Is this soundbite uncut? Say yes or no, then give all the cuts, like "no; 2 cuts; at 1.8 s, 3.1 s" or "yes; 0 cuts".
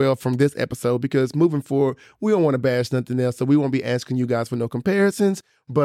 yes; 0 cuts